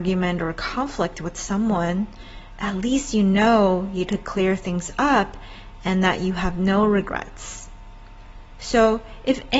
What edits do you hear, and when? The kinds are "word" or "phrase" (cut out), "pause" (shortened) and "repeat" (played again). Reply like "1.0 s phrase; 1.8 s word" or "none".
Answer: 4.1 s word